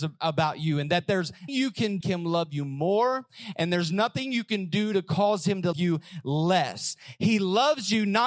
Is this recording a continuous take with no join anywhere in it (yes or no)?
no